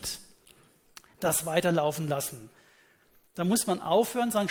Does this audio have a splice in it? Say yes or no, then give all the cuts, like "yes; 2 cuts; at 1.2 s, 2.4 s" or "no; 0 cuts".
no; 0 cuts